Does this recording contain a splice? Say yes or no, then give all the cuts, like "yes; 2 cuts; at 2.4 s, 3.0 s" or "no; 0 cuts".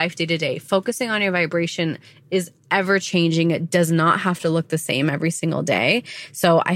no; 0 cuts